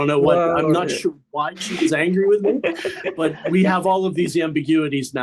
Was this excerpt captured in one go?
yes; 0 cuts

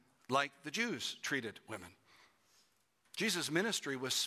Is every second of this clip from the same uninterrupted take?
yes; 0 cuts

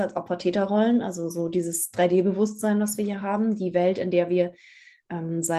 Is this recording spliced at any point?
no; 0 cuts

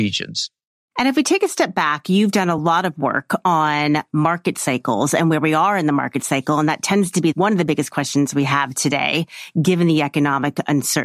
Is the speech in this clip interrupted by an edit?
no; 0 cuts

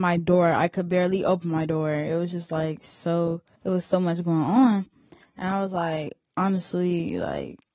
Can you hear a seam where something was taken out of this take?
yes; 1 cut; at 3.6 s

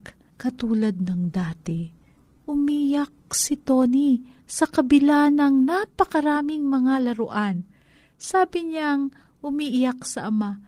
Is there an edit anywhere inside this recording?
no; 0 cuts

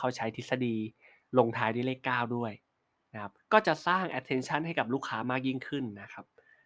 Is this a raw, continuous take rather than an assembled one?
yes; 0 cuts

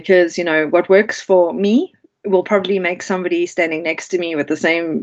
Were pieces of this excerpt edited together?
no; 0 cuts

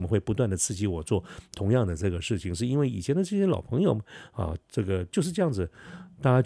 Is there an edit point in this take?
yes; 1 cut; at 4.6 s

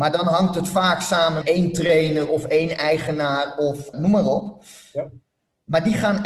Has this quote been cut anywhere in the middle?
yes; 2 cuts; at 1.4 s, 3.9 s

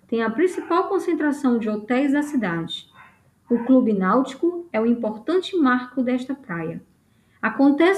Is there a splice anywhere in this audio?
no; 0 cuts

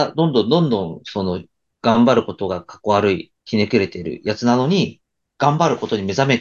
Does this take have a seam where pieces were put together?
yes; 1 cut; at 3.4 s

